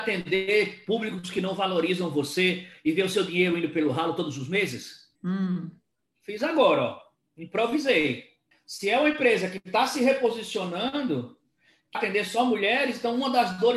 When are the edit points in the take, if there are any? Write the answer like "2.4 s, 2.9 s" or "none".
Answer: 5.2 s, 8.5 s, 11.9 s